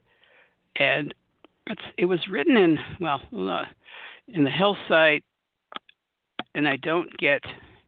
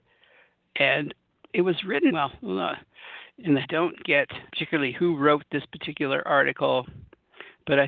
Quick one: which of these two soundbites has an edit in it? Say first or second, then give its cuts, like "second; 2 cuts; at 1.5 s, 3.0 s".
second; 4 cuts; at 1.5 s, 2.1 s, 3.6 s, 4.5 s